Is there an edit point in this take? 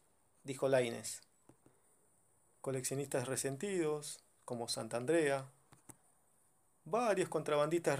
no; 0 cuts

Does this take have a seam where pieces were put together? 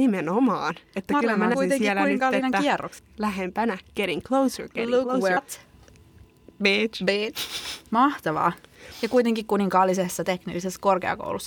yes; 3 cuts; at 1.5 s, 5.4 s, 7.9 s

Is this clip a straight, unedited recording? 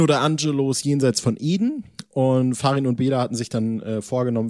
yes; 0 cuts

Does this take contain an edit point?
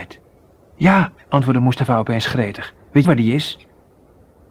yes; 2 cuts; at 1.1 s, 3.0 s

